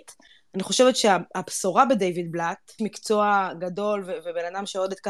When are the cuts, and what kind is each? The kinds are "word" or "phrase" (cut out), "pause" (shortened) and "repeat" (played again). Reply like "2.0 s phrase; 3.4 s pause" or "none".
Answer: 2.8 s phrase